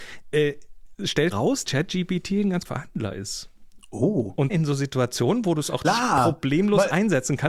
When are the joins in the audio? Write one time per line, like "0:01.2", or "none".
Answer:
0:01.3
0:01.6
0:02.6
0:04.5
0:05.8